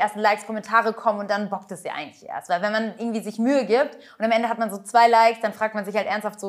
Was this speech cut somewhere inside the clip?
no; 0 cuts

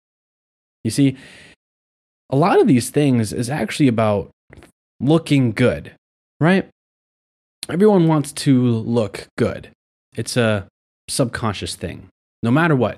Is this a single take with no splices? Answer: yes; 0 cuts

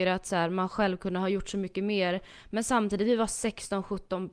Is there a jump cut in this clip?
no; 0 cuts

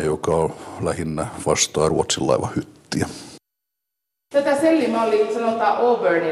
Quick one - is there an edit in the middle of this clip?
no; 0 cuts

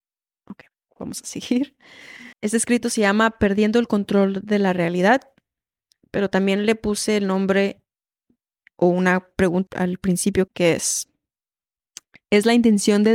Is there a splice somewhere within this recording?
yes; 3 cuts; at 2.3 s, 9.7 s, 10.5 s

